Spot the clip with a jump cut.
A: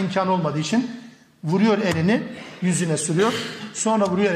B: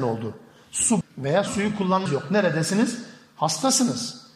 B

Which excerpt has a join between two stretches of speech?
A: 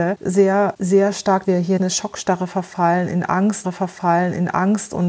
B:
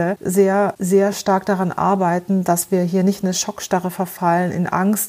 A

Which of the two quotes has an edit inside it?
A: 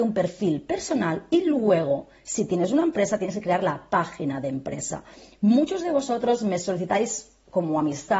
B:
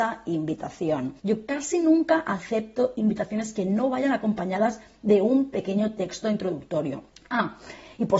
B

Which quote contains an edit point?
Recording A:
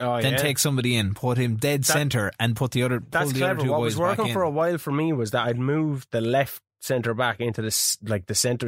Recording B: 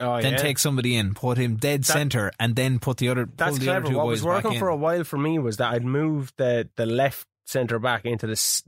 A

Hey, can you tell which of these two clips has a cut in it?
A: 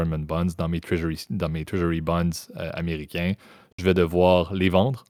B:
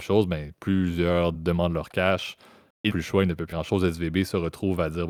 B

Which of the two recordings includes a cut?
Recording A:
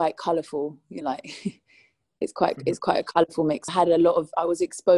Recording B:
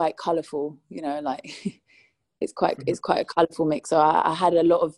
A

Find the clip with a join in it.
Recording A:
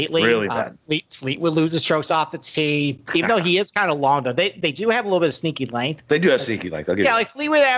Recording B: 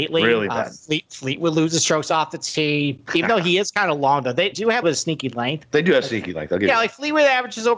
B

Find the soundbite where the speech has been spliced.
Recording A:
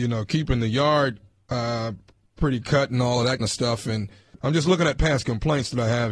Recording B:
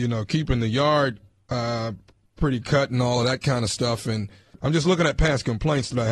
A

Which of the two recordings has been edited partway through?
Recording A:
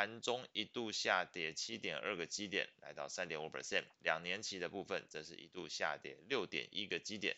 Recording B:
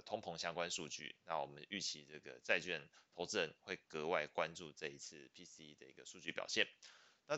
A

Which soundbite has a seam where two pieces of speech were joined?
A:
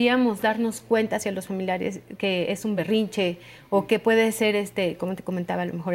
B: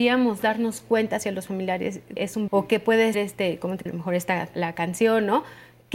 B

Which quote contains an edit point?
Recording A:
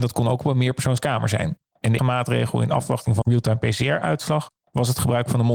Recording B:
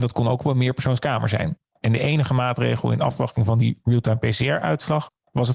A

